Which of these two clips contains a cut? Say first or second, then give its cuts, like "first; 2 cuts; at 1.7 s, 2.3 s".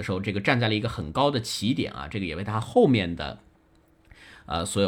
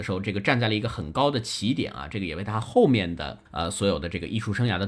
second; 1 cut; at 3.5 s